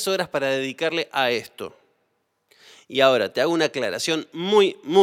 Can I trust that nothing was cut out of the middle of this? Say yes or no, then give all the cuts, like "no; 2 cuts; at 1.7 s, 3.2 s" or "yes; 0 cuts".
yes; 0 cuts